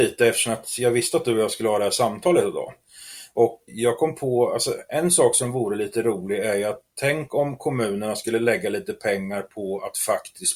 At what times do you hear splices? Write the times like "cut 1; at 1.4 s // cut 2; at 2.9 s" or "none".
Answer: cut 1; at 3.7 s